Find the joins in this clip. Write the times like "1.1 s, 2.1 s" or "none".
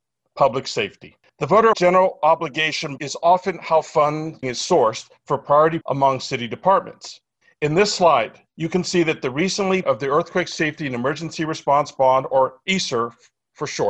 1.3 s, 1.7 s, 3.0 s, 4.4 s, 5.8 s, 7.4 s, 8.5 s, 9.8 s